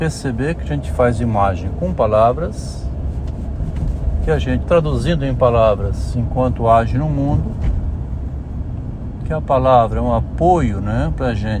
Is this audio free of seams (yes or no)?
no